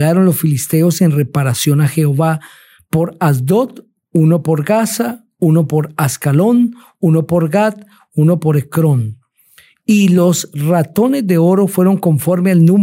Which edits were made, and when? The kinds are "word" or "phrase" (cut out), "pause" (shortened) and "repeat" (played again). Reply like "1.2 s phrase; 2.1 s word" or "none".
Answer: none